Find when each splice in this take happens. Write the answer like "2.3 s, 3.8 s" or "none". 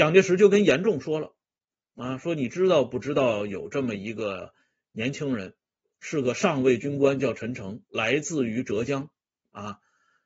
none